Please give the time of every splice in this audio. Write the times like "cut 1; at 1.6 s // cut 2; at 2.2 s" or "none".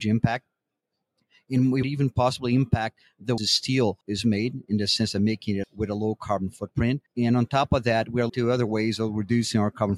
cut 1; at 1.8 s // cut 2; at 3.4 s // cut 3; at 4.0 s // cut 4; at 5.6 s // cut 5; at 7.1 s // cut 6; at 8.3 s